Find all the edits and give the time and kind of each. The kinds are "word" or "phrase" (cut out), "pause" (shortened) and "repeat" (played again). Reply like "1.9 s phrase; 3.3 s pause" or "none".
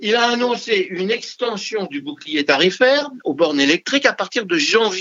none